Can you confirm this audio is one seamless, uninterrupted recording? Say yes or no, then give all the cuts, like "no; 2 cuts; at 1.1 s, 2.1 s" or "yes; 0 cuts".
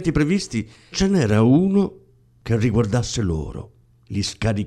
no; 1 cut; at 0.9 s